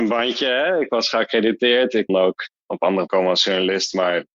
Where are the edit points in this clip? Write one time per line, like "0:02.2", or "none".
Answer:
0:02.1
0:03.1